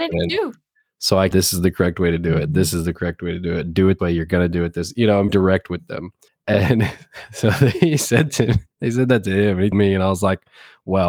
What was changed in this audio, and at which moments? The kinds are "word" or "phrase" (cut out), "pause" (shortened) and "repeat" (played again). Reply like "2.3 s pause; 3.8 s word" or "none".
1.3 s phrase; 4.0 s word; 5.3 s word; 6.3 s pause; 8.3 s word; 9.7 s word